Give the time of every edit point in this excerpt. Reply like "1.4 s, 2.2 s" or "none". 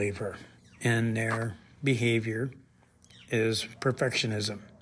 none